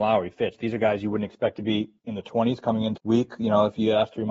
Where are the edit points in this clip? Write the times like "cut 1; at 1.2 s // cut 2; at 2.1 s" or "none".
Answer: cut 1; at 3.0 s